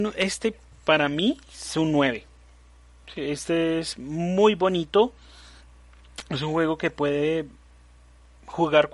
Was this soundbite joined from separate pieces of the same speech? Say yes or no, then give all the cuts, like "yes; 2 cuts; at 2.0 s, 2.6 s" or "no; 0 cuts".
no; 0 cuts